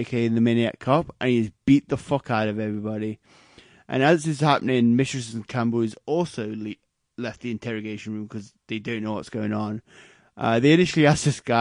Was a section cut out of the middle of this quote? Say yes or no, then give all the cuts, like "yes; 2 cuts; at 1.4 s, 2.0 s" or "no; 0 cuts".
no; 0 cuts